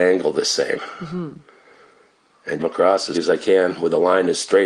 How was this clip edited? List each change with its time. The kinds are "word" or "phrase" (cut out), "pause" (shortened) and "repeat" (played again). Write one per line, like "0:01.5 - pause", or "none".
0:02.6 - phrase
0:03.1 - word